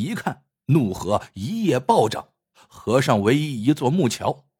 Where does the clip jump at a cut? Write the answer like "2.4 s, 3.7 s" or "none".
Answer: none